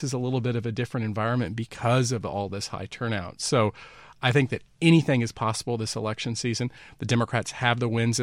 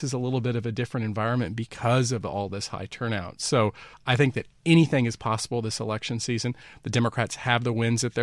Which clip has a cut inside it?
second; 1 cut; at 3.9 s

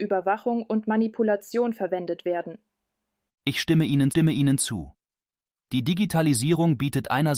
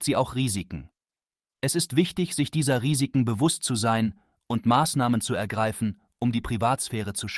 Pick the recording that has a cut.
first; 1 cut; at 4.1 s

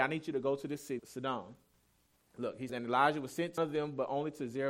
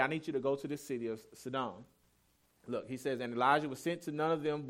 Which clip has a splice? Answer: first; 3 cuts; at 1.0 s, 2.7 s, 3.6 s

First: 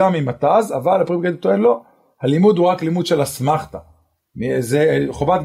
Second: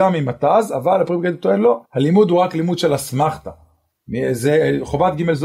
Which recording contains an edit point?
second; 1 cut; at 1.8 s

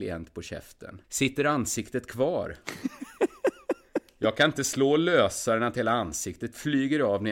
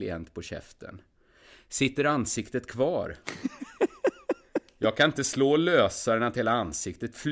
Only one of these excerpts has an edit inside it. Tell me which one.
first; 1 cut; at 1.0 s

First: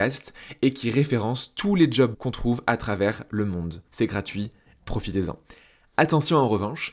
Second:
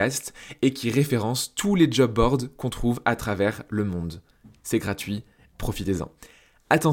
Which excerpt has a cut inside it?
first; 2 cuts; at 2.1 s, 3.9 s

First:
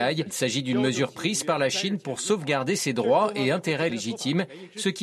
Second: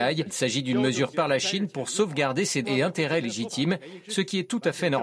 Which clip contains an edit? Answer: second; 2 cuts; at 1.1 s, 2.6 s

